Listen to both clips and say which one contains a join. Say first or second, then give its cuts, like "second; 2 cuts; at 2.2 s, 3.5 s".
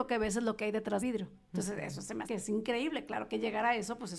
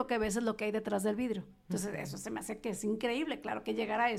first; 2 cuts; at 1.0 s, 2.2 s